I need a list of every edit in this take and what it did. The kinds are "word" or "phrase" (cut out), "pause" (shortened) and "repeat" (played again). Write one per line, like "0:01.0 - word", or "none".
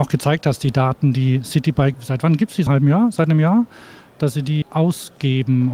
0:01.9 - word
0:02.7 - word
0:04.6 - word